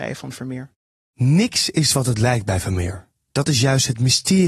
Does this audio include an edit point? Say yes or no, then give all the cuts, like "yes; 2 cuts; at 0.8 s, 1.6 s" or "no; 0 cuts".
no; 0 cuts